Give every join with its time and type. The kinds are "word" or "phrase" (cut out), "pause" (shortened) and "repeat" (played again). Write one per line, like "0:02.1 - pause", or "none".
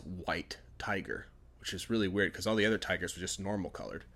none

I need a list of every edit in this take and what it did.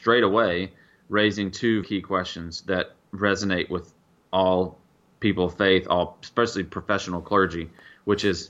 0:01.8 - word

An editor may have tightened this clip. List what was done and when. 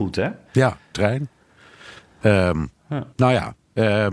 0:00.9 - phrase
0:03.1 - pause

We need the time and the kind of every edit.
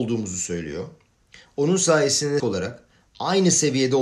0:02.4 - word

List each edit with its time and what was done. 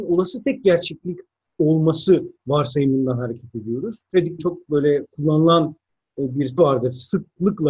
0:04.4 - word
0:06.6 - word

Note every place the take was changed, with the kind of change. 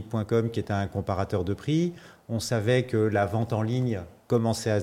none

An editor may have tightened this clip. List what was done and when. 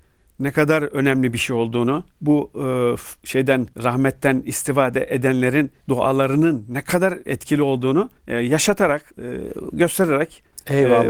0:02.1 - pause
0:03.7 - pause
0:05.8 - pause
0:08.2 - pause
0:09.1 - pause

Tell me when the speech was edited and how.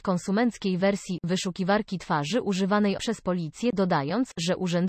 0:03.0 - word

